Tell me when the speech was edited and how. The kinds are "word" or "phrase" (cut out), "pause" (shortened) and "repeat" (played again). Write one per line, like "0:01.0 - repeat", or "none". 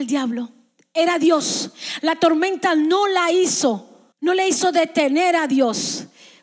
0:04.1 - pause